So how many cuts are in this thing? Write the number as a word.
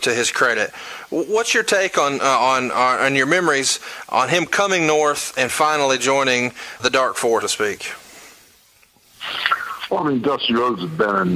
two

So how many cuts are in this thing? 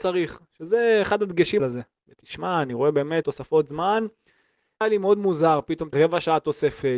four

